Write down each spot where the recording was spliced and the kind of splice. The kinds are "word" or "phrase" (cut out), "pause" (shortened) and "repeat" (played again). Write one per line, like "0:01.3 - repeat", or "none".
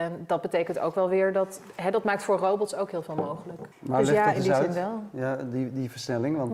0:03.7 - pause